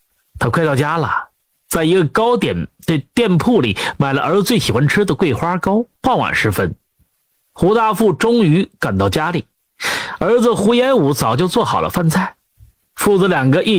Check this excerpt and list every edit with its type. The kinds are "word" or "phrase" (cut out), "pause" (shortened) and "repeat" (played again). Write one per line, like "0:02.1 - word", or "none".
0:05.9 - pause